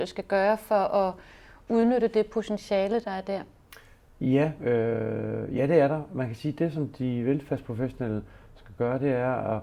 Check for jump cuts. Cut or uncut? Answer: uncut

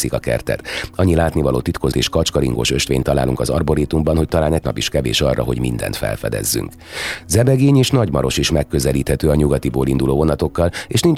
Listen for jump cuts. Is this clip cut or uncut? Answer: cut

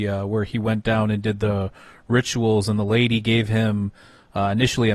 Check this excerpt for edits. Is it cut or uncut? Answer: uncut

